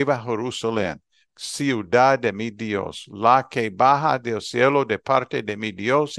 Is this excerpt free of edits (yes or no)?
yes